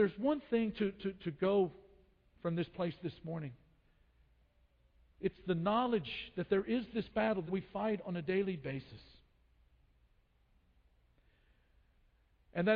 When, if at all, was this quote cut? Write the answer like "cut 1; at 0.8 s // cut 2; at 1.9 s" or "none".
cut 1; at 7.5 s